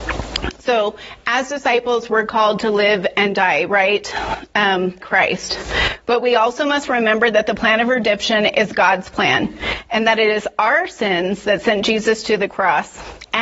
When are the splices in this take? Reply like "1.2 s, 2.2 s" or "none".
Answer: 5.0 s